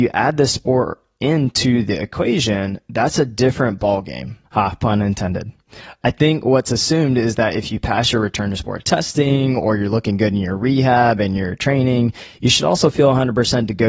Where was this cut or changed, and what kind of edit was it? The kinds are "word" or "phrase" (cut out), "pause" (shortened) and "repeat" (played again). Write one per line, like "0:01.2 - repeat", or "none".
0:04.4 - pause

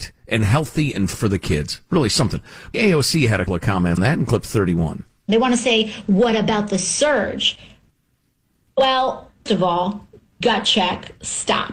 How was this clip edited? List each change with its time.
0:01.1 - word
0:02.7 - word
0:03.5 - word
0:04.0 - word
0:09.5 - word
0:10.4 - word

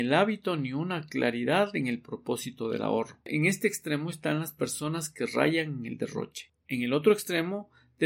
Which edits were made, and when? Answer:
none

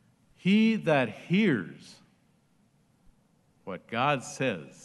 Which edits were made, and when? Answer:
none

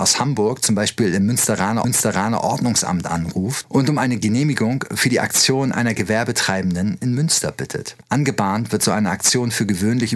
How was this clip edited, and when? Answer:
0:01.8 - repeat
0:08.0 - pause

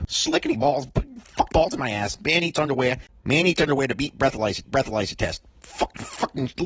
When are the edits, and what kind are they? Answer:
0:01.5 - word
0:04.6 - repeat

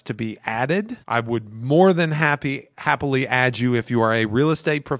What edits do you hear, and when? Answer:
0:01.0 - pause

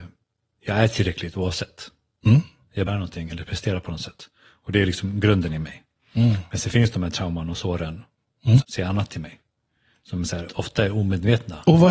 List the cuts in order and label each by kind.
0:02.9 - phrase
0:08.6 - word
0:10.5 - word

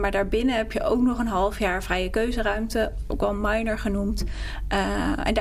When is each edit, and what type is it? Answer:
none

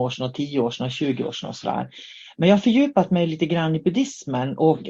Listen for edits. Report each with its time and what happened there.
none

